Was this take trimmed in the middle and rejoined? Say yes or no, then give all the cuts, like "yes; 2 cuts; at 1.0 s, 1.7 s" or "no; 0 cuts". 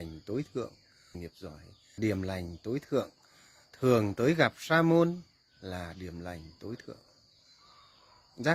yes; 2 cuts; at 1.1 s, 2.0 s